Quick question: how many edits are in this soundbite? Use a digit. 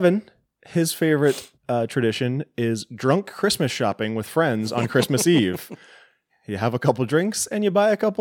1